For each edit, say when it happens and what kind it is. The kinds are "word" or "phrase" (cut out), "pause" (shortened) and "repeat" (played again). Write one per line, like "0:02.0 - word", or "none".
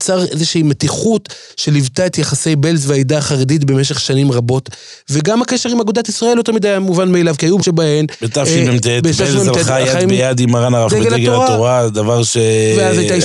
0:07.6 - word
0:10.9 - word